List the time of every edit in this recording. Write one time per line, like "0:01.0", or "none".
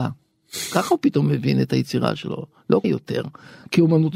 0:02.8